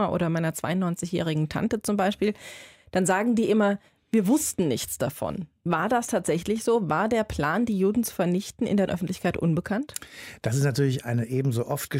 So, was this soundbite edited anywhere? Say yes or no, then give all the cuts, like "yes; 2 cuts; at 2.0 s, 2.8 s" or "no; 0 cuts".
yes; 1 cut; at 8.9 s